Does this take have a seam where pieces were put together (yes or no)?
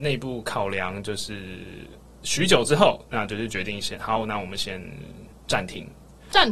yes